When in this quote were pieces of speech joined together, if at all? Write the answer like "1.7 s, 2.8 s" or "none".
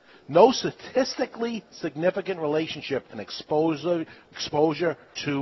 3.1 s